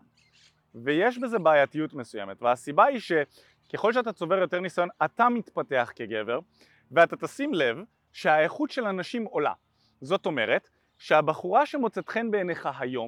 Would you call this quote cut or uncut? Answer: uncut